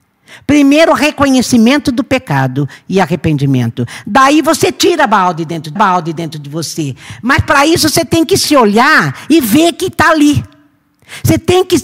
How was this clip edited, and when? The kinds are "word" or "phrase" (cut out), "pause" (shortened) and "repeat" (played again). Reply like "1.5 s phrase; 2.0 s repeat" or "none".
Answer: 5.8 s repeat